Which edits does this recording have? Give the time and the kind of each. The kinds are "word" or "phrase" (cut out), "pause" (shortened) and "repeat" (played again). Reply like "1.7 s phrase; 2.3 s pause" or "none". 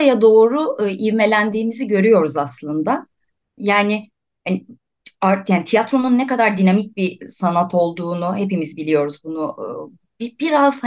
none